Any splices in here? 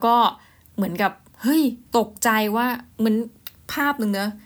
yes; 2 cuts; at 1.9 s, 2.9 s

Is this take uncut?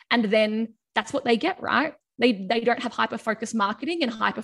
yes; 0 cuts

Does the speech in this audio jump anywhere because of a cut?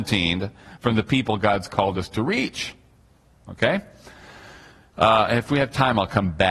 no; 0 cuts

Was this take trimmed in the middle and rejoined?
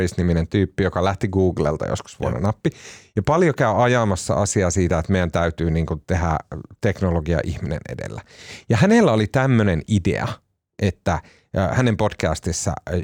no; 0 cuts

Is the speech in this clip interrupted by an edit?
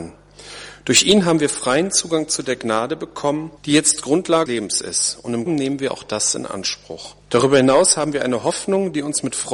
yes; 4 cuts; at 3.6 s, 4.5 s, 5.5 s, 7.2 s

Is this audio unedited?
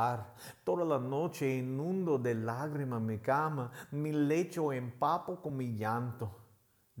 yes; 0 cuts

